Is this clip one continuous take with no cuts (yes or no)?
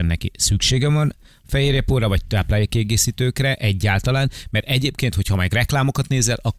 yes